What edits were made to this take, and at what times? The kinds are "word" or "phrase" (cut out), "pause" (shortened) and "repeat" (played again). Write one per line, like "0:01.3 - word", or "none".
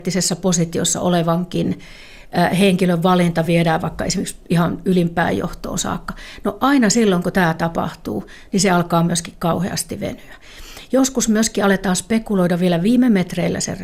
none